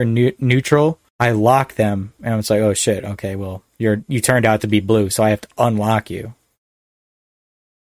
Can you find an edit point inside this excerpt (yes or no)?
yes